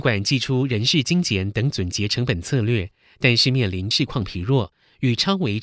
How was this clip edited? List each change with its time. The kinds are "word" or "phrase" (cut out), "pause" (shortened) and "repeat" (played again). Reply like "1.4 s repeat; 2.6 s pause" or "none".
3.9 s word